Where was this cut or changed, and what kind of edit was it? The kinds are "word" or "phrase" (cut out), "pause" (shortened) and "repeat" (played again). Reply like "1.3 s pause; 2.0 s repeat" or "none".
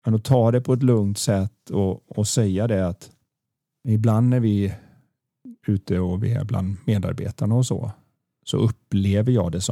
none